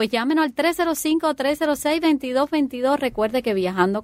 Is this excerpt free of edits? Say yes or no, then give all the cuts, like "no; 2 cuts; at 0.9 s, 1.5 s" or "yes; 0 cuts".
yes; 0 cuts